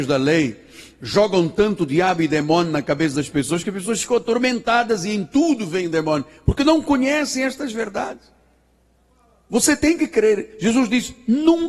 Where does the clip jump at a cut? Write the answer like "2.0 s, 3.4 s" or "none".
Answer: none